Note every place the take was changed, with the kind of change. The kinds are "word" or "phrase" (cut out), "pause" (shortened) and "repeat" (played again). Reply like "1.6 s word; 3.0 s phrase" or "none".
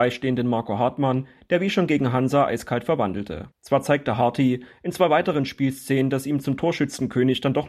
3.5 s pause